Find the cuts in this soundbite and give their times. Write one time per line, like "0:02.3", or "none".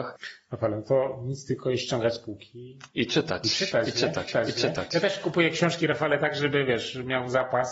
0:04.3